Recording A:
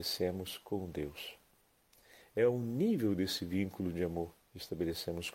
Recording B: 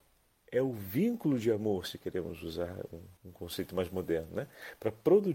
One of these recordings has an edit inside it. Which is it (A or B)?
B